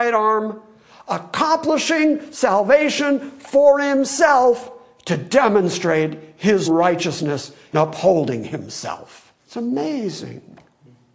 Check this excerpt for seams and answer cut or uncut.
cut